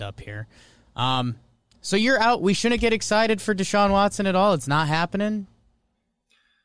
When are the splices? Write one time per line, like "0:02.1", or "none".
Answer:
none